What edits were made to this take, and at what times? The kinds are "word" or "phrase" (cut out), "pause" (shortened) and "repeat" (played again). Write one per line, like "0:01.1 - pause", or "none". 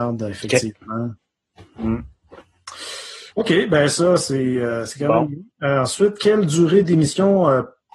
0:03.3 - pause